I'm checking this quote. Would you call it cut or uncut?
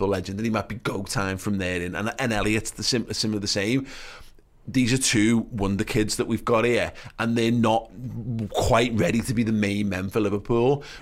uncut